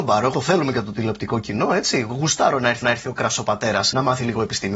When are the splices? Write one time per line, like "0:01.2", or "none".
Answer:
0:02.8